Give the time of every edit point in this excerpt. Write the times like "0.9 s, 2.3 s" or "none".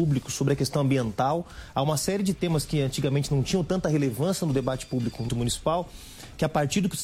5.3 s